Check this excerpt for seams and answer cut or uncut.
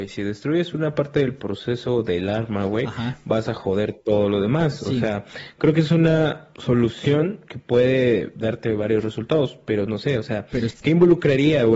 uncut